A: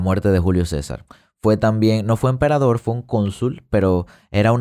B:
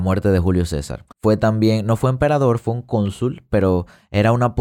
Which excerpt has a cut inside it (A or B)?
B